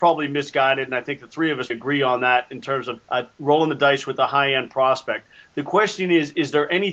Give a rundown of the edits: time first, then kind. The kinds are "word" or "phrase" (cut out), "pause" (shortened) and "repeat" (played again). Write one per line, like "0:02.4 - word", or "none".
0:01.7 - word
0:03.0 - pause